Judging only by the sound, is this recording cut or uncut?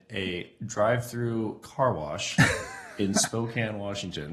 uncut